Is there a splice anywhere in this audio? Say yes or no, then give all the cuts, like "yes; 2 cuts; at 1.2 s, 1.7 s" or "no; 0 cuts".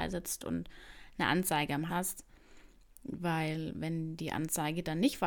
yes; 1 cut; at 1.9 s